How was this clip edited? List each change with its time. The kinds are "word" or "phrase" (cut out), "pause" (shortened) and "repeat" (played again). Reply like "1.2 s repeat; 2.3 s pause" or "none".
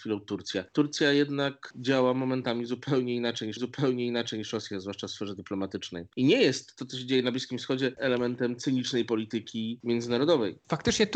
3.6 s repeat; 7.9 s phrase